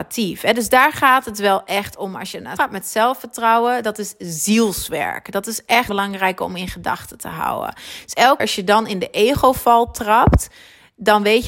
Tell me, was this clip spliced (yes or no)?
yes